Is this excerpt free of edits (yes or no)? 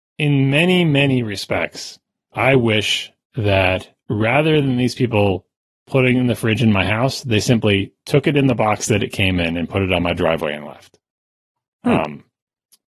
no